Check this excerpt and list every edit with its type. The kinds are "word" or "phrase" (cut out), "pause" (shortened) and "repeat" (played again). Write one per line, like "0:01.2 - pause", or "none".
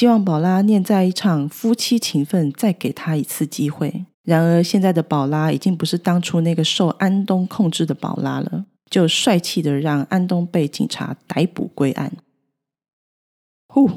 0:04.1 - pause
0:08.7 - pause